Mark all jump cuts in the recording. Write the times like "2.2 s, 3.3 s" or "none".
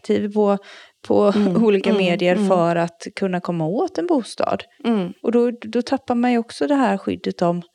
none